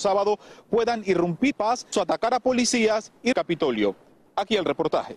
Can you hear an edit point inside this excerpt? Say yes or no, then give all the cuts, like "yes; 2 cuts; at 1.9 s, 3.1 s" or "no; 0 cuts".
yes; 3 cuts; at 1.5 s, 1.9 s, 3.3 s